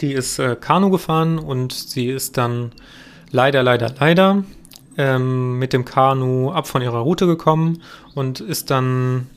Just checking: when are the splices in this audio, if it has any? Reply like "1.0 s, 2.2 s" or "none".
none